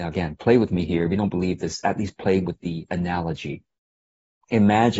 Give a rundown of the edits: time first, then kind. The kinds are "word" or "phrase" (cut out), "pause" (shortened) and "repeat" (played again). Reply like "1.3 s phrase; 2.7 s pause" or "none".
none